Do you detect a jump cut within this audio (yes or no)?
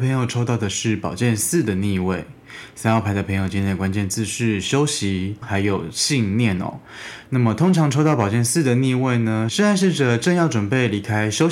yes